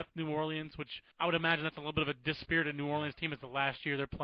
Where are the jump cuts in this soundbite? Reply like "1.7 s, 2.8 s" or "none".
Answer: 1.1 s